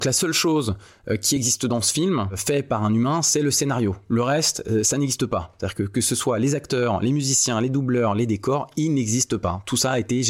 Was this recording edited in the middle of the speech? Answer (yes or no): no